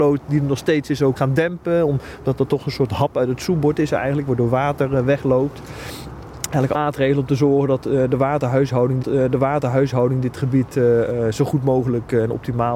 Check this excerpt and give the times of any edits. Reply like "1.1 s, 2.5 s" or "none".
1.2 s, 6.7 s, 9.0 s